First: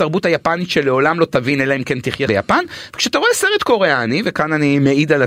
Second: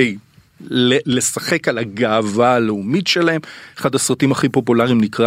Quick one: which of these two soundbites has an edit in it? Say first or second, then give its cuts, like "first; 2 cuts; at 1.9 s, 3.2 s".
first; 1 cut; at 2.3 s